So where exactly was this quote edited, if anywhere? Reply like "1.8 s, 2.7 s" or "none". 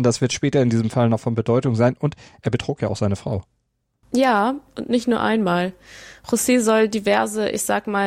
none